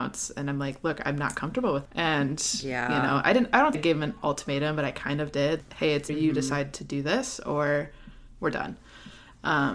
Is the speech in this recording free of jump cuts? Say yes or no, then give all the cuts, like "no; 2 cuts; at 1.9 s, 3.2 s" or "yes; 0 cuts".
no; 4 cuts; at 1.8 s, 3.7 s, 5.6 s, 6.1 s